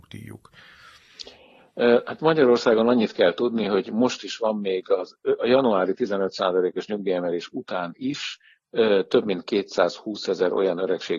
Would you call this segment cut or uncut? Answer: uncut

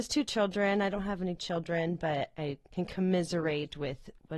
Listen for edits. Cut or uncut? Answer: uncut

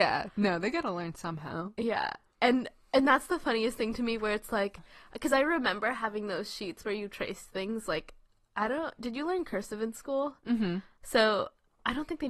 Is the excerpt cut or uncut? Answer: uncut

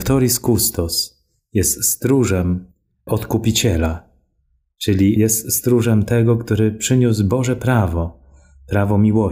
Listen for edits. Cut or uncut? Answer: uncut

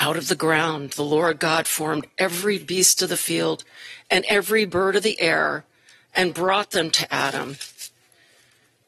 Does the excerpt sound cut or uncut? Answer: uncut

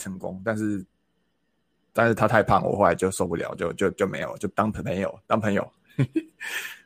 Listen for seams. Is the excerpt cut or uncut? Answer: uncut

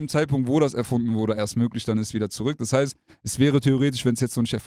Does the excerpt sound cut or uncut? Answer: uncut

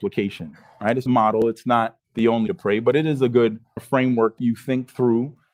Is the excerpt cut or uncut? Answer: cut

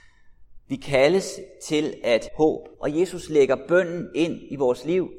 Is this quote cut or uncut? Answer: cut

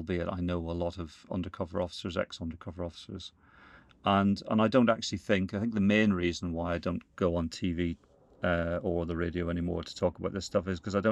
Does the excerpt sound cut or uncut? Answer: uncut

